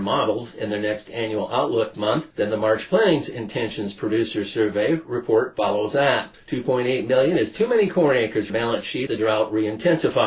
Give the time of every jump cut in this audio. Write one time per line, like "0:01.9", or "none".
0:01.9
0:02.3
0:06.3
0:08.5
0:09.1